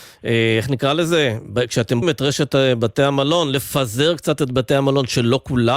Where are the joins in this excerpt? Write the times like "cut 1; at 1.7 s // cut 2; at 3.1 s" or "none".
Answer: cut 1; at 2.0 s

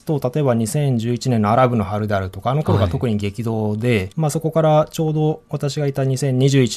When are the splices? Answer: cut 1; at 4.1 s

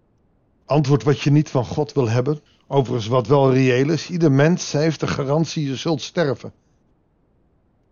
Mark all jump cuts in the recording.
cut 1; at 2.5 s

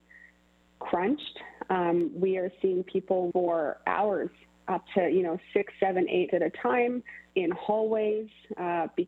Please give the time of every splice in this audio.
cut 1; at 3.3 s // cut 2; at 6.3 s // cut 3; at 7.3 s

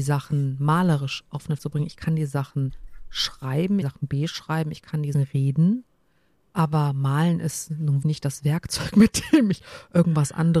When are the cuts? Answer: cut 1; at 1.6 s // cut 2; at 3.8 s // cut 3; at 5.1 s // cut 4; at 8.0 s

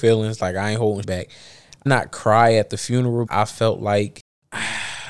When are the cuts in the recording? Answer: cut 1; at 1.0 s // cut 2; at 1.9 s // cut 3; at 3.3 s

